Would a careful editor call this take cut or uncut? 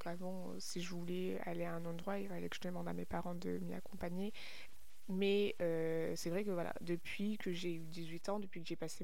uncut